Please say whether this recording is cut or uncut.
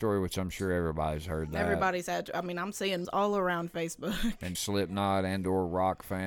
cut